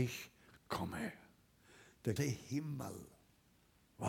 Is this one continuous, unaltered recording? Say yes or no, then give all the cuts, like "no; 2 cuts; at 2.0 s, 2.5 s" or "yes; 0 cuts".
no; 1 cut; at 2.2 s